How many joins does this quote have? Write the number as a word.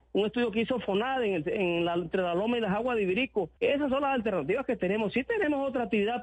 one